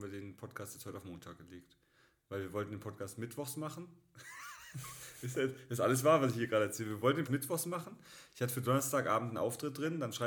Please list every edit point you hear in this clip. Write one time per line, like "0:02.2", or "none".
0:07.3